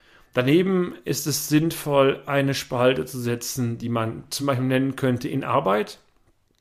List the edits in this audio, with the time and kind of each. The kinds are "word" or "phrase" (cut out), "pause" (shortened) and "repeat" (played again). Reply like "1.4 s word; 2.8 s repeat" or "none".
none